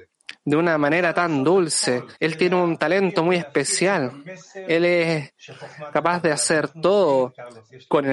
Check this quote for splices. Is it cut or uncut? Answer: cut